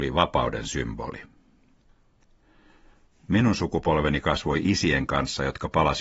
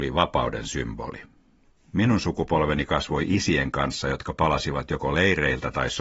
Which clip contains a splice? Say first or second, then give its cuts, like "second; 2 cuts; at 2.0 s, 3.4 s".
second; 1 cut; at 1.6 s